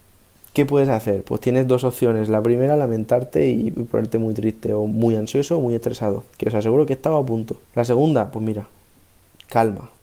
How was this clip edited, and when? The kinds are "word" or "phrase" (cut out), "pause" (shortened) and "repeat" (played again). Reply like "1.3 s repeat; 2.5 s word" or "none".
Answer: 6.3 s pause; 7.6 s pause